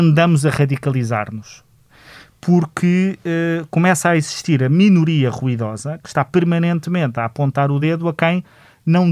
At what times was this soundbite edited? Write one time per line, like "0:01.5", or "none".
none